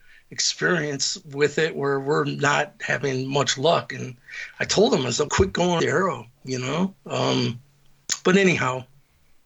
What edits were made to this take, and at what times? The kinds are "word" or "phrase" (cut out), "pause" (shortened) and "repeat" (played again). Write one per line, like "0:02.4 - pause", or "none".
0:05.3 - word
0:05.8 - phrase
0:07.0 - pause